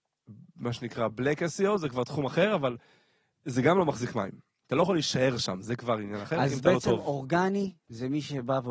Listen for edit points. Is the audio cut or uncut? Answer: uncut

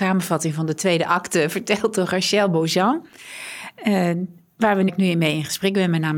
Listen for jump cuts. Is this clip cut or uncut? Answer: cut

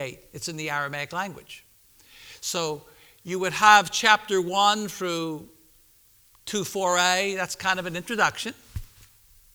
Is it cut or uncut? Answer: uncut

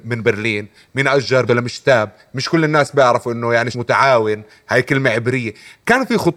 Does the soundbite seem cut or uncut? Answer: cut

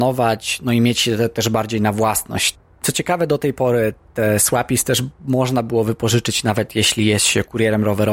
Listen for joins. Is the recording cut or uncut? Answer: uncut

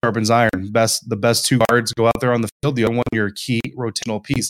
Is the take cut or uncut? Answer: uncut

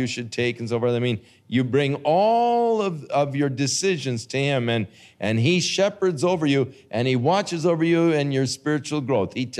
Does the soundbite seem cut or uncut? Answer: uncut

